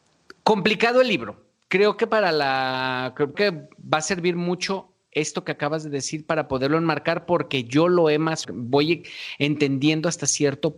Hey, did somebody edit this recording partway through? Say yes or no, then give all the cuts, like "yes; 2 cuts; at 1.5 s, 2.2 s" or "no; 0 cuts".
yes; 2 cuts; at 3.3 s, 8.4 s